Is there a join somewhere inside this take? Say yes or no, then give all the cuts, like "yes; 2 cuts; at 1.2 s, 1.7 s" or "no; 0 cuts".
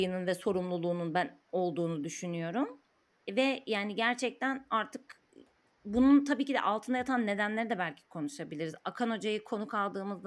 no; 0 cuts